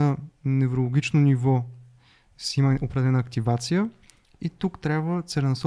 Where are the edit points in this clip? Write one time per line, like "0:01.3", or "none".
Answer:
none